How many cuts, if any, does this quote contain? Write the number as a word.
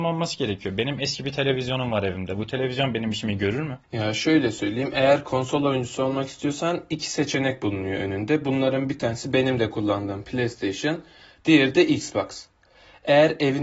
one